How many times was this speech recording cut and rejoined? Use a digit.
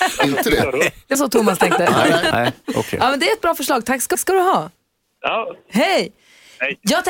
4